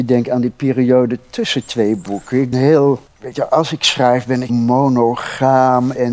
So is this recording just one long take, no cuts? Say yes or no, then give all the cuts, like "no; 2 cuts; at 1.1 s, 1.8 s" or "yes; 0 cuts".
no; 3 cuts; at 2.5 s, 3.1 s, 4.5 s